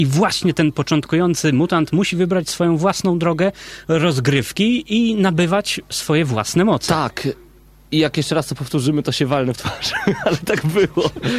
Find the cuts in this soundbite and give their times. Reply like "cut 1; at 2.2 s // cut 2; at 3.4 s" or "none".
none